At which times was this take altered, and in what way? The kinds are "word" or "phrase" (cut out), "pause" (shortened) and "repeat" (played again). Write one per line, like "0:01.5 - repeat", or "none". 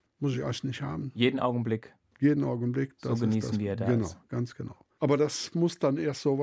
none